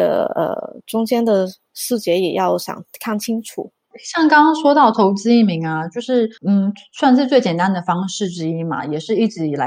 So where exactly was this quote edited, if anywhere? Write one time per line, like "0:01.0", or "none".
0:06.4